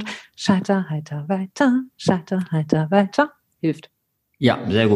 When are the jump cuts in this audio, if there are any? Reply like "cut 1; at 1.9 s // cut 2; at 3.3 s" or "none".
none